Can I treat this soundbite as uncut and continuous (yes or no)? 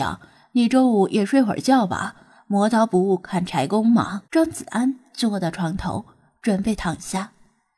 no